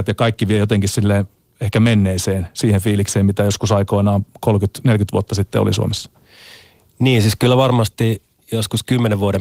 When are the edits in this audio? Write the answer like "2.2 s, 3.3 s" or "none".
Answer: none